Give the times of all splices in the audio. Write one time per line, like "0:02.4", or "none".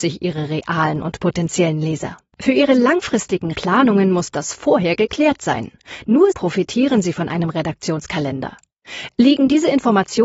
0:03.5
0:06.3